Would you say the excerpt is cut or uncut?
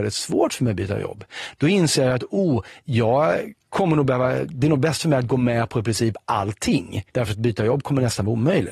cut